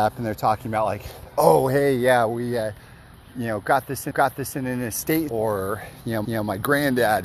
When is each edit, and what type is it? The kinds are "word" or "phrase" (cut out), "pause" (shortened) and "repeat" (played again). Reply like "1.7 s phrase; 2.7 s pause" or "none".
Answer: 4.1 s repeat; 5.3 s word; 6.2 s repeat